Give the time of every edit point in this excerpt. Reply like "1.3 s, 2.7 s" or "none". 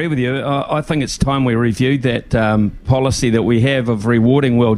none